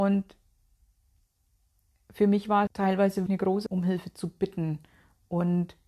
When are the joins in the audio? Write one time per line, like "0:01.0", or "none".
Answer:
0:02.7
0:03.3
0:03.7